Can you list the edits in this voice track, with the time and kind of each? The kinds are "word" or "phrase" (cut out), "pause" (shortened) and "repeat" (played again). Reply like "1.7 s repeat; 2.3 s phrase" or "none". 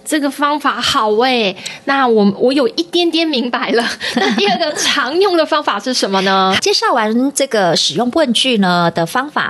6.6 s phrase